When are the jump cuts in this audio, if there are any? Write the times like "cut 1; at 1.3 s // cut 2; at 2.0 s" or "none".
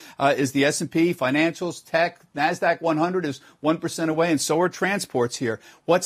none